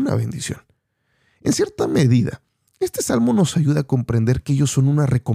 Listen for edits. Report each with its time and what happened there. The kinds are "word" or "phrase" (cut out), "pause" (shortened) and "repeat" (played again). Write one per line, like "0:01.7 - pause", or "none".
none